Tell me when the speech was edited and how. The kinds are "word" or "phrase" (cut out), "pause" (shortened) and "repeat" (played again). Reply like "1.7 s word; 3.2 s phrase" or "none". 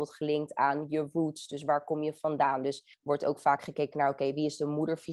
2.9 s pause